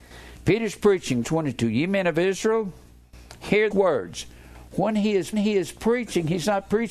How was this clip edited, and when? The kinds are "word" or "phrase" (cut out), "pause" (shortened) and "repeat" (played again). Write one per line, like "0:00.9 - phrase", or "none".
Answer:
0:01.2 - word
0:03.7 - word
0:05.3 - repeat